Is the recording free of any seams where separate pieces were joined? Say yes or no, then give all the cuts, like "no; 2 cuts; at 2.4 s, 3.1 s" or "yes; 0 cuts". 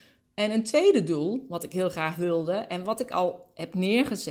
yes; 0 cuts